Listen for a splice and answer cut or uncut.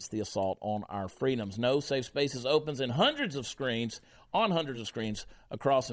uncut